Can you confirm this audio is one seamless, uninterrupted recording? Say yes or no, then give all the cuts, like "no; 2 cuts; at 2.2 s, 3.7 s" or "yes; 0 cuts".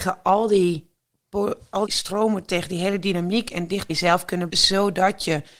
no; 3 cuts; at 1.9 s, 3.9 s, 4.5 s